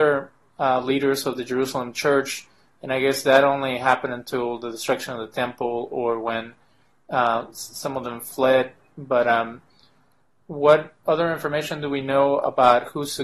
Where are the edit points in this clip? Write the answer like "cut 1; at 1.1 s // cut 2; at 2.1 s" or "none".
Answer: none